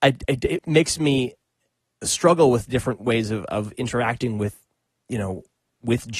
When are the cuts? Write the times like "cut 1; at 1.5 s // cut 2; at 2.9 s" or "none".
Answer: none